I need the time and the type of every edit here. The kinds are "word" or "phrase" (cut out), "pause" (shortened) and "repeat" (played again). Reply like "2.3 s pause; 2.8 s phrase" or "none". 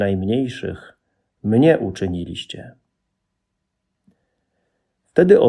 none